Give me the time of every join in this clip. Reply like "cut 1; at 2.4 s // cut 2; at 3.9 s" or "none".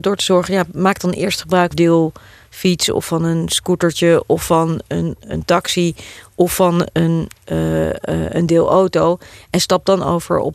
cut 1; at 1.7 s

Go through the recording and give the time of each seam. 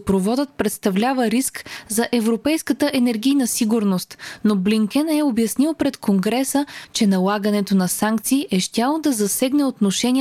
none

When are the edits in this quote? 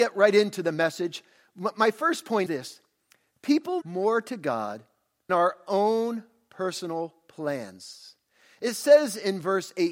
cut 1; at 2.5 s // cut 2; at 3.8 s // cut 3; at 5.3 s

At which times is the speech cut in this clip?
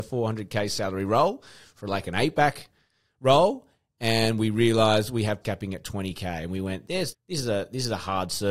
cut 1; at 5.4 s // cut 2; at 7.1 s

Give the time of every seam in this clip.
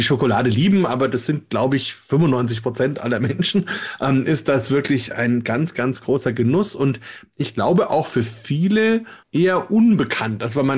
cut 1; at 9.2 s

